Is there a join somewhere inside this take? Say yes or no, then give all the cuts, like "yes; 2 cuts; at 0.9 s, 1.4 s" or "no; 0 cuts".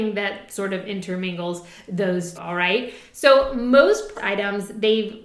yes; 2 cuts; at 2.3 s, 4.1 s